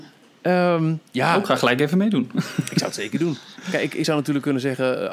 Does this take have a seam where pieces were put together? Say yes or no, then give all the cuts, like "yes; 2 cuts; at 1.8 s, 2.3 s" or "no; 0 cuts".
no; 0 cuts